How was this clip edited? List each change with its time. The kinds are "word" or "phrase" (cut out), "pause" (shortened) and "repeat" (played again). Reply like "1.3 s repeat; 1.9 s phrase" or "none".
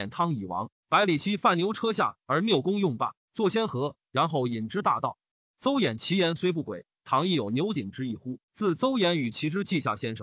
8.4 s pause